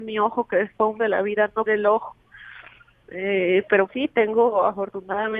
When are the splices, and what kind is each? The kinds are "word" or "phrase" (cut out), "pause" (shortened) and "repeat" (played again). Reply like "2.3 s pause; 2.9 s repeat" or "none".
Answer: 1.0 s word; 1.7 s word; 3.9 s word